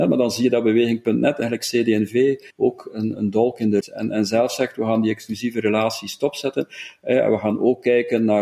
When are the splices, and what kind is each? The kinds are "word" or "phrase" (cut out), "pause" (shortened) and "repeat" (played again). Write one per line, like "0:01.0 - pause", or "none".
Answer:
0:02.5 - pause
0:03.2 - word
0:03.8 - phrase